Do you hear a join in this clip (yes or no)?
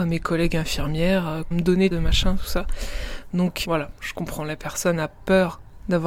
yes